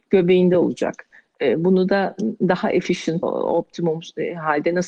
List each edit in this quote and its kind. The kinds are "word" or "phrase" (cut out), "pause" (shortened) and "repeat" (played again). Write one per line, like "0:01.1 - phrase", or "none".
0:03.2 - word